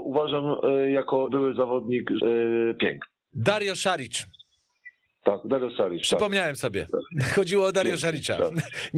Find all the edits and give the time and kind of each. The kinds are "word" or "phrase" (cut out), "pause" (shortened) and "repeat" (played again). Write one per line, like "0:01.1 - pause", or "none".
0:01.3 - word
0:02.2 - phrase
0:05.1 - pause